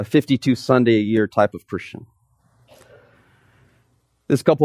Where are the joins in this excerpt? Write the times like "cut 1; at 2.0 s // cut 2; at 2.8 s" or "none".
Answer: none